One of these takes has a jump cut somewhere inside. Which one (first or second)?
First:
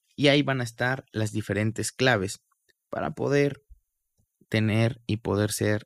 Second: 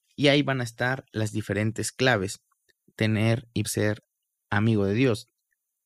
second